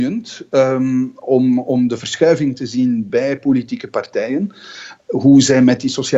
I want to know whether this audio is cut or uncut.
uncut